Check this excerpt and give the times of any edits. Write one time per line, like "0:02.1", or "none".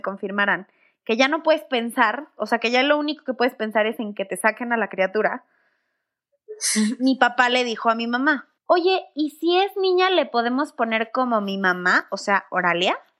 0:08.6